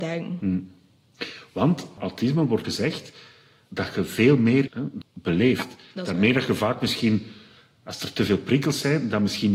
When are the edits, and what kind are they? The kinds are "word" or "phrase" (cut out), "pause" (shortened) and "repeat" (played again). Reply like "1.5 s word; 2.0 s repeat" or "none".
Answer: 2.0 s word; 2.6 s word; 4.7 s word; 5.0 s word